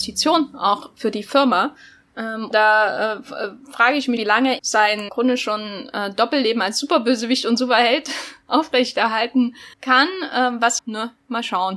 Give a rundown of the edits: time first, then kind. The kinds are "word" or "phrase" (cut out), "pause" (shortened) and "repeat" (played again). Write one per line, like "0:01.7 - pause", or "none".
0:02.5 - word
0:03.6 - pause
0:04.2 - word
0:04.6 - word
0:05.1 - word
0:09.7 - pause
0:10.8 - phrase

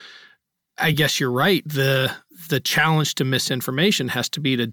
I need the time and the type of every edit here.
none

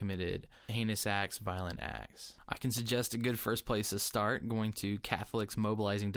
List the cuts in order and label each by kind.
none

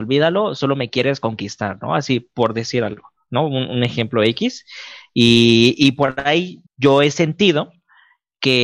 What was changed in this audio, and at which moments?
0:06.7 - pause

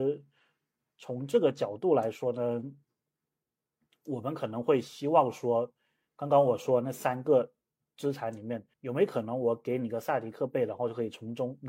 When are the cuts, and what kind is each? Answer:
0:08.7 - pause

